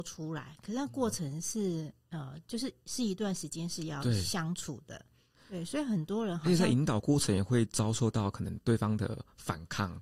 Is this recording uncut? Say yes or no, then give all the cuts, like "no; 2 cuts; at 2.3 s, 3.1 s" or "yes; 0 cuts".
yes; 0 cuts